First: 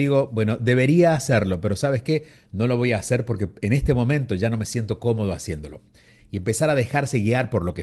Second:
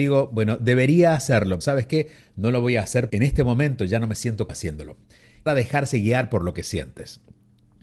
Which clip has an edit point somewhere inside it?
second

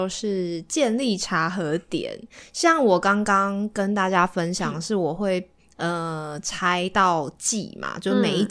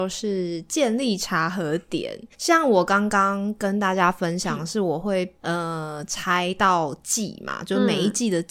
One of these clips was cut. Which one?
second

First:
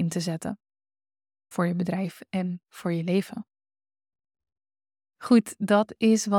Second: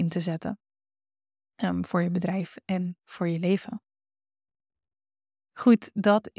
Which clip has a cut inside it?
first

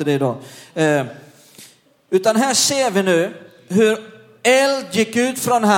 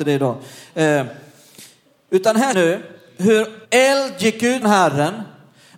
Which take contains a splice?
second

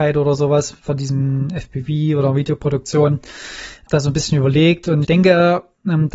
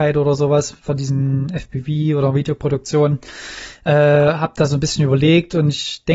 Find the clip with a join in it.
first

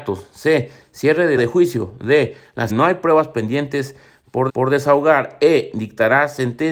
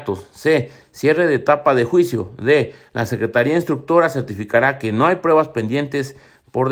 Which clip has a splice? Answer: first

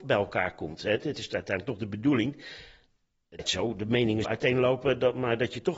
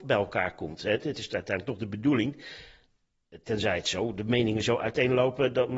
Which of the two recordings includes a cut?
first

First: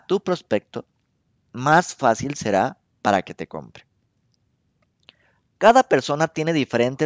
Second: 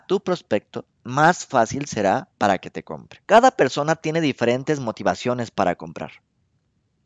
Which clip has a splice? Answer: second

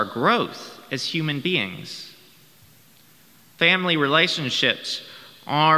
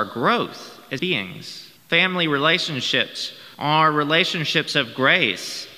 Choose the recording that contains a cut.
second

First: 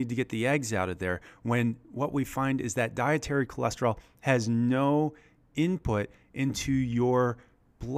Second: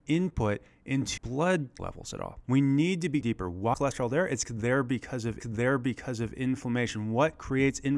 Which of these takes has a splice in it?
second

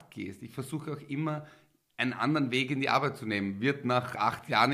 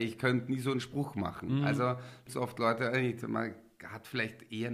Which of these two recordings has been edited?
second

